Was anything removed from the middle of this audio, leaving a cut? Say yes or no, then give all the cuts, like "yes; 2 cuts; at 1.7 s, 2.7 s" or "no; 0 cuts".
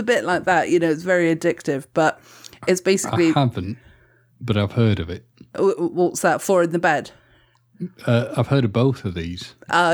no; 0 cuts